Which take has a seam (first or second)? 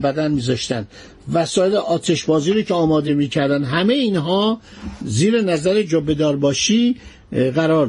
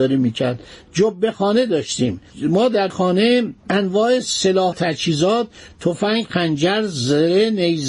second